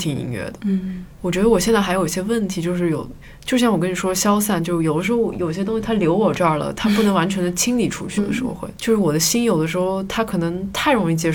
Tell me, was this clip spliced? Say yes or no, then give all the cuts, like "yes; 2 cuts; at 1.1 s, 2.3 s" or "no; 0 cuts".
yes; 1 cut; at 8.2 s